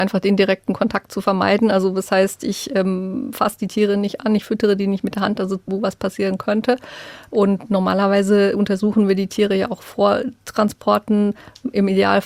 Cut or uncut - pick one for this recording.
cut